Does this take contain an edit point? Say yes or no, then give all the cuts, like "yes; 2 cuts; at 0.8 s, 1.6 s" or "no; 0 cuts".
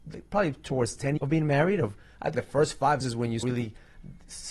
yes; 4 cuts; at 1.2 s, 2.3 s, 3.0 s, 3.4 s